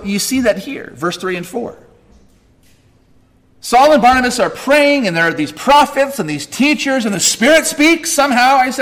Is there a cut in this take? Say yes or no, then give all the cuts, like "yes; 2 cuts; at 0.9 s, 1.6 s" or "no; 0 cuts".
no; 0 cuts